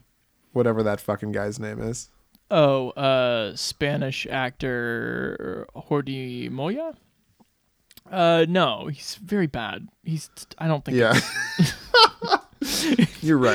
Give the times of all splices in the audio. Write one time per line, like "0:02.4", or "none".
none

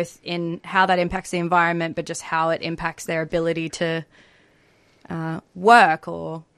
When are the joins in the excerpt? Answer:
none

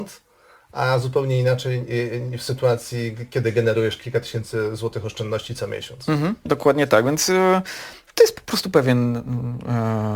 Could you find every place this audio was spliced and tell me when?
0:06.5

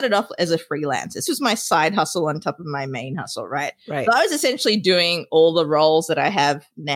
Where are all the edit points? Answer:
0:01.3

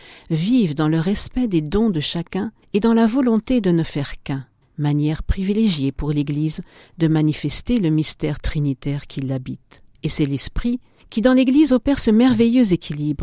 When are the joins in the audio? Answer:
none

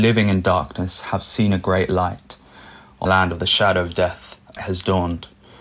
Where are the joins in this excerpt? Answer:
0:03.1
0:04.6

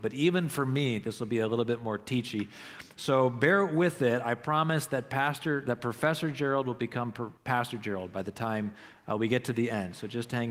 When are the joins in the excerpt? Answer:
0:07.4

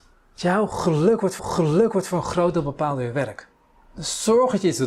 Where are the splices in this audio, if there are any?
0:01.4

